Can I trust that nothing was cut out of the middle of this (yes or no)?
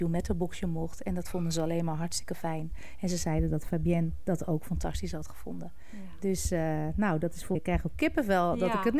no